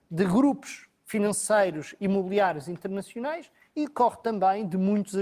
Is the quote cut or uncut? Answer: uncut